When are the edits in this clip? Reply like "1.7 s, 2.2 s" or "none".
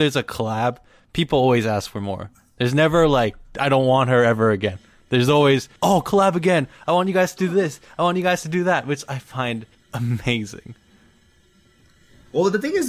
5.8 s, 9.7 s